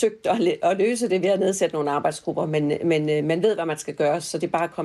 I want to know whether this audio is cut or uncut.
uncut